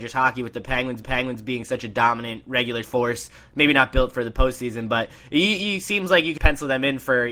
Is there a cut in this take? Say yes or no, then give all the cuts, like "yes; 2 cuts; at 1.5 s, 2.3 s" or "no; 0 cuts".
yes; 3 cuts; at 1.0 s, 2.8 s, 6.4 s